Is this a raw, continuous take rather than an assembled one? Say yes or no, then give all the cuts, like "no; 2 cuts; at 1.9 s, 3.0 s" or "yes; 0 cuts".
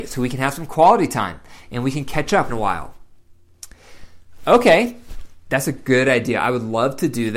no; 1 cut; at 2.5 s